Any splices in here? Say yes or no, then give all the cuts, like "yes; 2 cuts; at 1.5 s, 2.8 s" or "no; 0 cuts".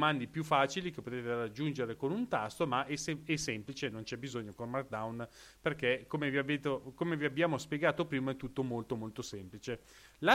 no; 0 cuts